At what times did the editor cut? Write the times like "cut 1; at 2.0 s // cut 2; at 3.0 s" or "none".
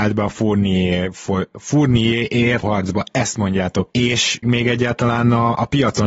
cut 1; at 2.6 s // cut 2; at 3.9 s // cut 3; at 4.4 s